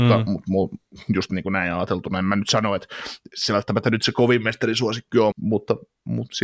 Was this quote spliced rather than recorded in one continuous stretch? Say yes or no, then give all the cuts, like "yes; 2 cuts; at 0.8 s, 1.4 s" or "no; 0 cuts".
yes; 1 cut; at 5.3 s